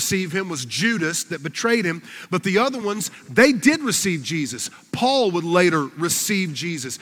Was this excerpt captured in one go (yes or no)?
yes